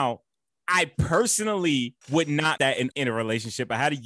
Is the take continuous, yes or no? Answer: no